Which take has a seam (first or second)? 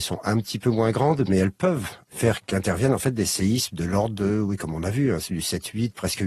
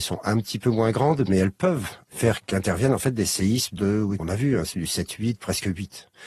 second